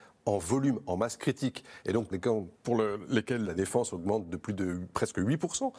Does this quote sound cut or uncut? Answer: cut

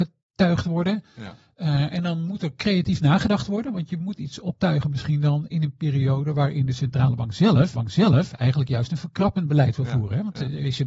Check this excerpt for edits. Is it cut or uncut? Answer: cut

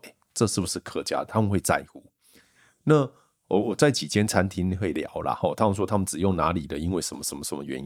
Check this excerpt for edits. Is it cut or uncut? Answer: uncut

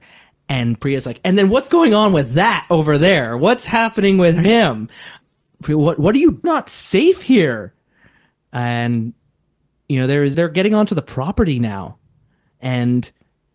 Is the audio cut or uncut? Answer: cut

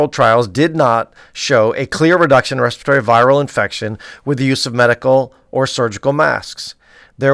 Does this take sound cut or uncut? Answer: uncut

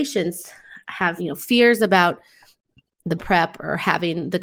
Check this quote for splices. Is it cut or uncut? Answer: cut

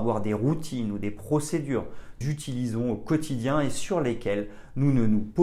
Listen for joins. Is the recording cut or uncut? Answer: cut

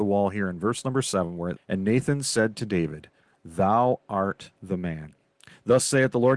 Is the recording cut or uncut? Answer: cut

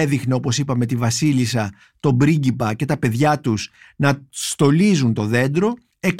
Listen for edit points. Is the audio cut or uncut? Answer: uncut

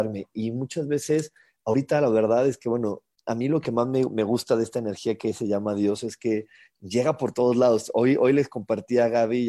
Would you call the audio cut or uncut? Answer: uncut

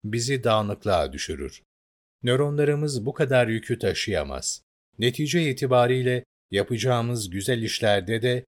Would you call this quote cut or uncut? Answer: uncut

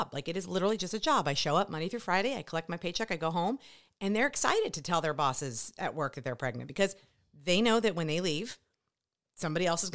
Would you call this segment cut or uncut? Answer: uncut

